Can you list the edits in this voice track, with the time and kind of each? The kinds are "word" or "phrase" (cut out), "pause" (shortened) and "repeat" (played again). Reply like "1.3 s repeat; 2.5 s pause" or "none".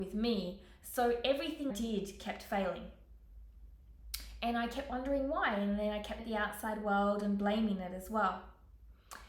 1.7 s word; 6.2 s word